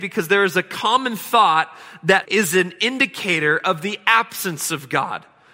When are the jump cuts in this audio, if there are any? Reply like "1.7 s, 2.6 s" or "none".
2.2 s